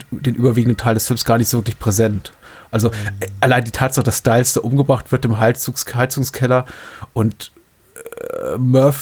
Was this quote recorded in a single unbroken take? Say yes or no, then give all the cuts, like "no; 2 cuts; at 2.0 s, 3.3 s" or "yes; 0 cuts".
yes; 0 cuts